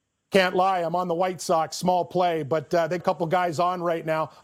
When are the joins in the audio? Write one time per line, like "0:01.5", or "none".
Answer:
0:03.0

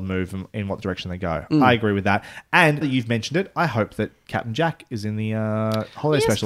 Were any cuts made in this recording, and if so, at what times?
0:02.8

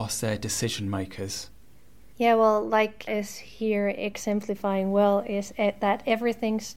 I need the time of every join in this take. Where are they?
0:02.1
0:03.1

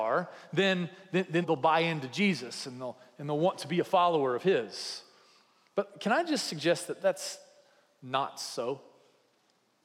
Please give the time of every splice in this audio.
0:01.4

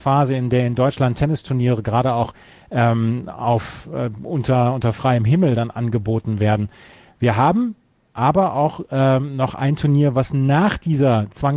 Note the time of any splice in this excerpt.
none

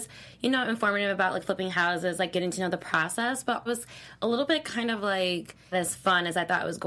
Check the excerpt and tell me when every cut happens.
0:03.7
0:05.7

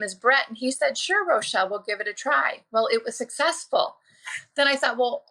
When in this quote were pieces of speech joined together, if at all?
none

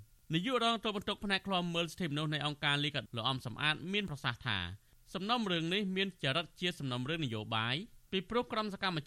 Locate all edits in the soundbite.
0:03.1

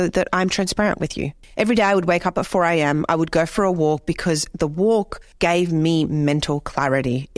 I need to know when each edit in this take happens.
none

